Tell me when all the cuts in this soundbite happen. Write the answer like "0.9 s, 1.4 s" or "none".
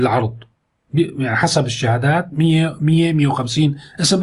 none